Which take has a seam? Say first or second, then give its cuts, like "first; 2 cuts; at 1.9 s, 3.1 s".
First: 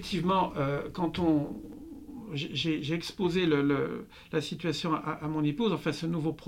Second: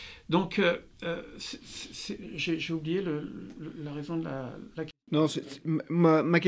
second; 1 cut; at 5.0 s